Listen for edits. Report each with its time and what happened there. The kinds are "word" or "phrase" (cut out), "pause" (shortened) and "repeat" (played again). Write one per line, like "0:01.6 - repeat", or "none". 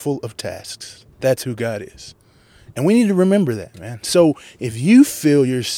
0:01.1 - pause